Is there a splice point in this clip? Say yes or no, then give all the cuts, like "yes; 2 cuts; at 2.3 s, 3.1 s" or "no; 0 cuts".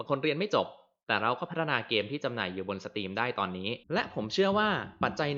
yes; 1 cut; at 3.8 s